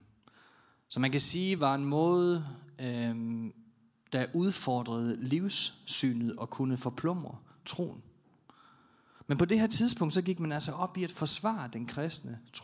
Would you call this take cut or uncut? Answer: uncut